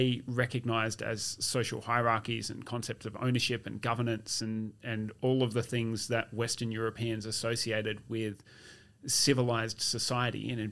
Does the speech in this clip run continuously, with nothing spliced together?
yes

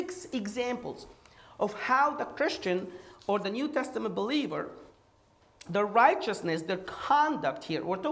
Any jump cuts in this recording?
no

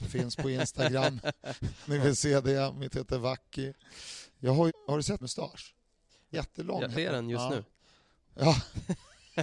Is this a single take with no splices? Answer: no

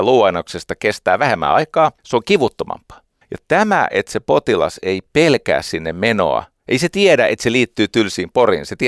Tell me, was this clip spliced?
yes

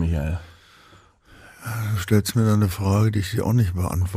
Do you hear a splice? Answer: no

